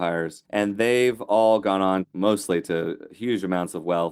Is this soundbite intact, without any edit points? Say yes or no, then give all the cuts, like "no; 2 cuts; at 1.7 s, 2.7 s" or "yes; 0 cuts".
yes; 0 cuts